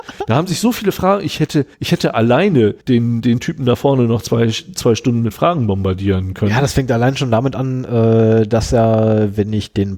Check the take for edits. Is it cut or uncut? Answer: cut